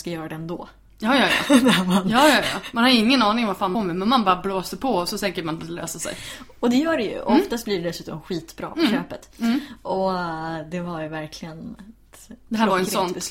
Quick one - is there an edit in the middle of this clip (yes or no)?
yes